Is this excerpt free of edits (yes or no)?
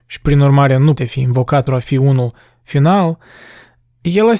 no